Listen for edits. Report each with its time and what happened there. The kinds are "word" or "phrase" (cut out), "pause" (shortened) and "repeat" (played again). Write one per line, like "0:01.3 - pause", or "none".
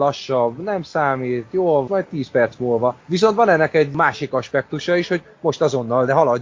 0:01.9 - phrase
0:03.0 - pause